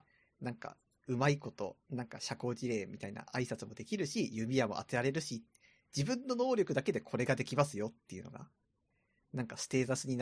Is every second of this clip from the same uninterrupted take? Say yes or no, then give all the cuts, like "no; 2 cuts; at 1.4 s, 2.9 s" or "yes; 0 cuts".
yes; 0 cuts